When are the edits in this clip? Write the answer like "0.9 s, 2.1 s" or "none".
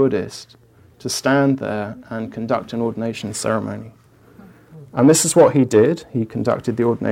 none

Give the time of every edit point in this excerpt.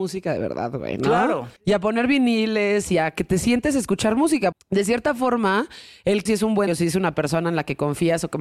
1.6 s, 4.5 s, 6.3 s, 6.7 s

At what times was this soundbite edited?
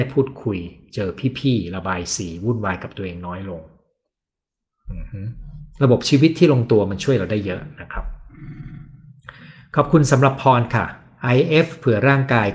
none

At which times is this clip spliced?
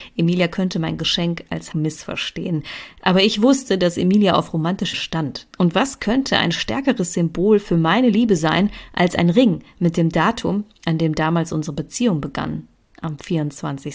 1.7 s, 4.9 s, 5.5 s

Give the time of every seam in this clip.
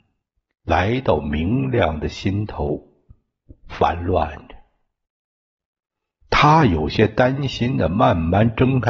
none

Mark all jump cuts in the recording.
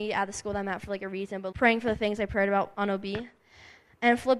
1.5 s, 2.7 s

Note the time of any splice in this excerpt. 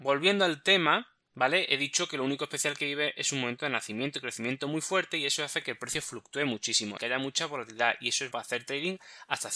7.0 s, 8.3 s

